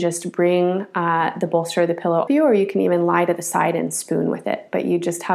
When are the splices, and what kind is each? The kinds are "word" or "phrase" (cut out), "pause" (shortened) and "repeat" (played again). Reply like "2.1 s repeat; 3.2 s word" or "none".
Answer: 2.3 s phrase